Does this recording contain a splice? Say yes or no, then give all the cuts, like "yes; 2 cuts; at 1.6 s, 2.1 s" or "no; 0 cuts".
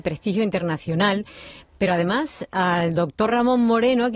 no; 0 cuts